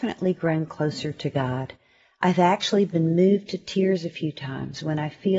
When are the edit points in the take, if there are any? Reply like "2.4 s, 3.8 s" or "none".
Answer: none